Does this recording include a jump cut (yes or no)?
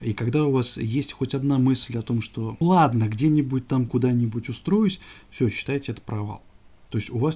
yes